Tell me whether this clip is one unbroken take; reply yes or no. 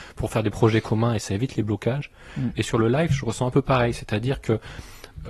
yes